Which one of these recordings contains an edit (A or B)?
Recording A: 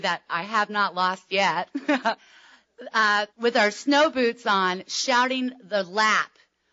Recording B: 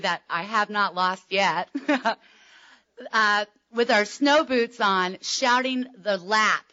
A